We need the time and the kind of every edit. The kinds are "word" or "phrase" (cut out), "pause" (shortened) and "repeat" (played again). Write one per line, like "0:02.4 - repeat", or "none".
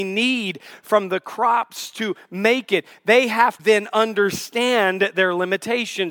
0:03.6 - word